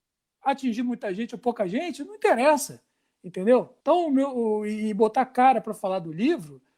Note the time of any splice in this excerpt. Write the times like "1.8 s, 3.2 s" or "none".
3.8 s